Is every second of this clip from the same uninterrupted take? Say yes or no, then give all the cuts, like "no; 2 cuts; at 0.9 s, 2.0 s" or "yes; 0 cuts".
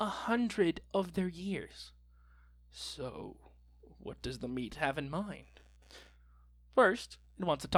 yes; 0 cuts